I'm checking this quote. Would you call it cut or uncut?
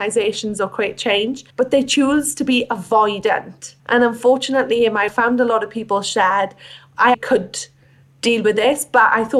cut